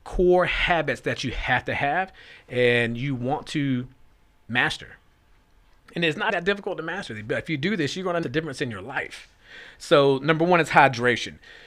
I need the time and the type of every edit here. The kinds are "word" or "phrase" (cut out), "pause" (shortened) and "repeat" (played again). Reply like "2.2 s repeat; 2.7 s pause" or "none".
6.3 s word; 8.2 s word

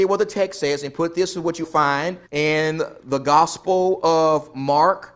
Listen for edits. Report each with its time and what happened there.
1.6 s word; 2.3 s pause

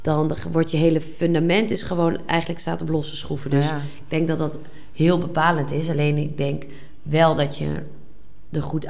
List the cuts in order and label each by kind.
none

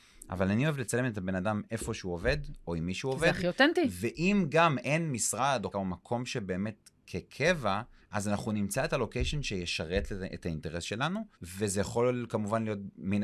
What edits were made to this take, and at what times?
5.7 s word; 8.0 s pause; 11.3 s pause

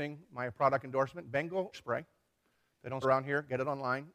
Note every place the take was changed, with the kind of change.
1.7 s word; 3.0 s word

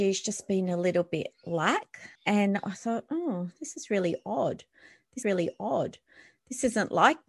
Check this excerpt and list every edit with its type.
2.2 s pause; 5.2 s repeat

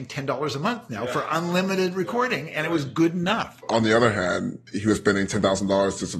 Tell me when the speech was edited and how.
none

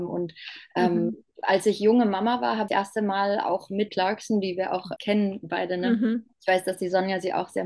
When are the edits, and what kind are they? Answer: 1.3 s pause; 2.7 s word; 3.9 s phrase; 5.0 s word; 6.3 s pause

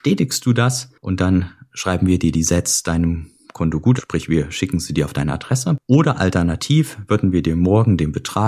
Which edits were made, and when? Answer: 4.0 s word

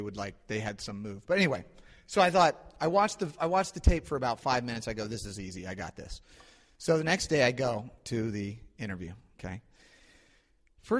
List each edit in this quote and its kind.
none

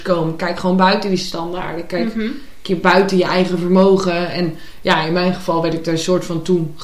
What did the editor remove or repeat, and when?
none

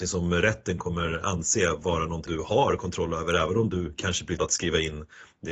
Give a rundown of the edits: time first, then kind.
2.3 s word; 4.4 s word

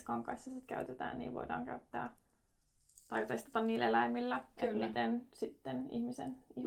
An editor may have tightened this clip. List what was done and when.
none

